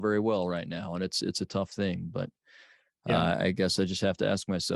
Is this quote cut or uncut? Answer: uncut